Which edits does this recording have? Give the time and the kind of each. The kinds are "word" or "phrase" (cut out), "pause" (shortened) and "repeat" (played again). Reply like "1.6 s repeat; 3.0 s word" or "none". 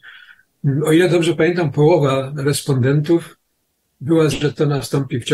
4.3 s word